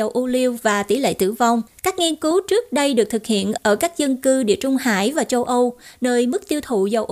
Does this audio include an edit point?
yes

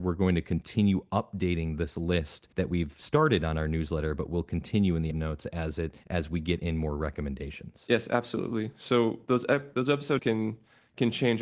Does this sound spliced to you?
yes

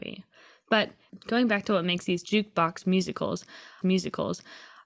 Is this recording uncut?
no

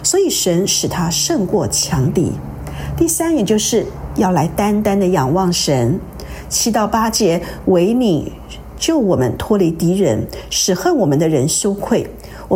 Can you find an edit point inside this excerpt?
no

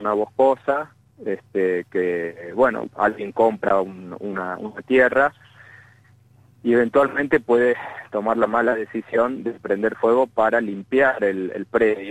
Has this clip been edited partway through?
no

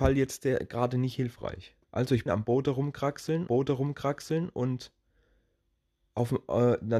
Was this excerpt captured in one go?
no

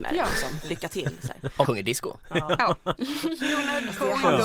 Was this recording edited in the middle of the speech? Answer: yes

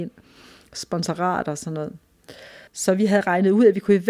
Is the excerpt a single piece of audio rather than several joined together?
no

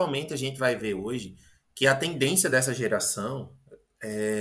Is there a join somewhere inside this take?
no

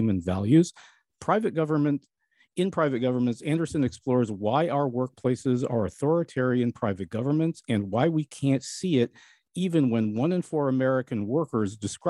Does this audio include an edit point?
no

